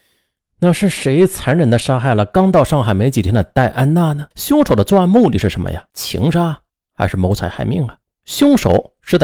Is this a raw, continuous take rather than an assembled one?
no; 4 cuts; at 4.3 s, 5.9 s, 6.7 s, 8.0 s

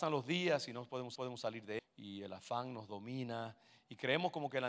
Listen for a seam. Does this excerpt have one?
yes; 2 cuts; at 1.2 s, 1.8 s

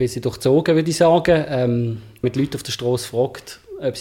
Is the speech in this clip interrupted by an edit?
yes; 1 cut; at 2.2 s

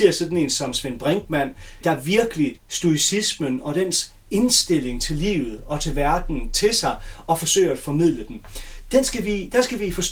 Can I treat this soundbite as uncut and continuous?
no; 2 cuts; at 1.8 s, 2.6 s

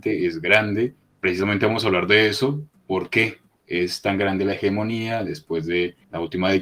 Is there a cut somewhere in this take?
no; 0 cuts

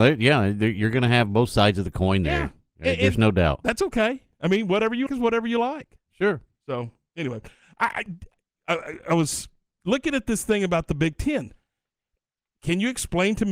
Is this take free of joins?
no; 1 cut; at 5.1 s

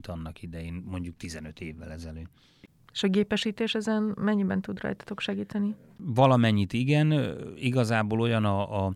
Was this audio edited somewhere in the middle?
no; 0 cuts

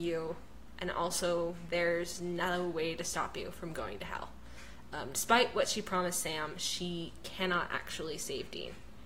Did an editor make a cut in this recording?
no; 0 cuts

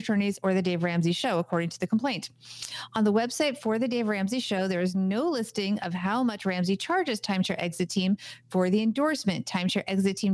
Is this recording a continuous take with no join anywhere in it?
yes; 0 cuts

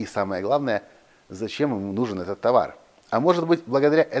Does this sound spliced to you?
no; 0 cuts

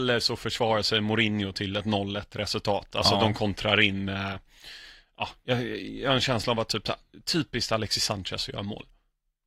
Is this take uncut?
yes; 0 cuts

